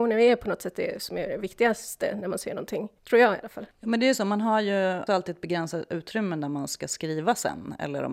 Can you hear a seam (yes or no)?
yes